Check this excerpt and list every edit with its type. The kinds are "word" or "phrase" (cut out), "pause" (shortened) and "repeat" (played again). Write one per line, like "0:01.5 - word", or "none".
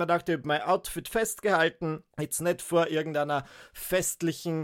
0:02.1 - pause